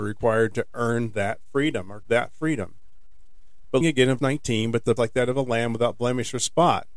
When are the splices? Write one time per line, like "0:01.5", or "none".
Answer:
0:02.0
0:03.8
0:04.2
0:05.0